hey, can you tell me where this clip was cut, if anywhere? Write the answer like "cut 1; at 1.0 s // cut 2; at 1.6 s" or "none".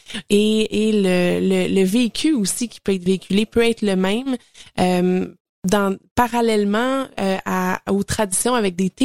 none